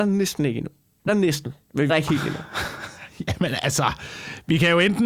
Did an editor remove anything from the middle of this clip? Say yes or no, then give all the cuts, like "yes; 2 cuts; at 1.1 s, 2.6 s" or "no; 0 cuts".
yes; 2 cuts; at 1.1 s, 1.9 s